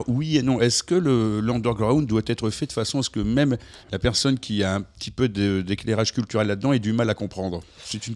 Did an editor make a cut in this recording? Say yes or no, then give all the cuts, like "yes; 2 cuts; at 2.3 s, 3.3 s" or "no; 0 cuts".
yes; 1 cut; at 3.8 s